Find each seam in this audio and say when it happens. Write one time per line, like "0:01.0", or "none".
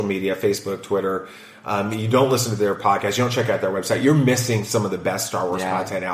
none